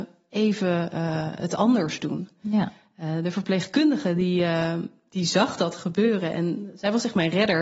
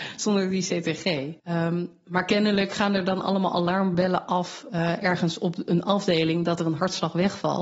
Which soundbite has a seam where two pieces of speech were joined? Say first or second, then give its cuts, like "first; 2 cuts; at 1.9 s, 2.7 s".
second; 1 cut; at 1.4 s